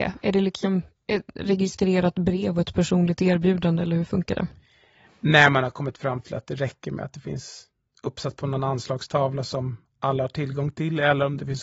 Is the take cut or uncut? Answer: uncut